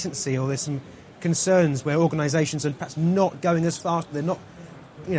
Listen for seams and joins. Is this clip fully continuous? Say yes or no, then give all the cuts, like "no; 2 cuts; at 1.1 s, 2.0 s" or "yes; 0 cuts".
yes; 0 cuts